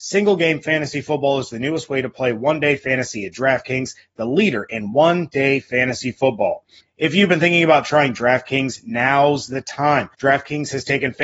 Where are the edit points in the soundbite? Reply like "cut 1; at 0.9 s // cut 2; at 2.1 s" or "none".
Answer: cut 1; at 6.8 s // cut 2; at 10.1 s